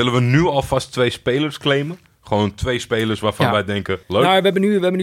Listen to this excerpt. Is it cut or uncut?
cut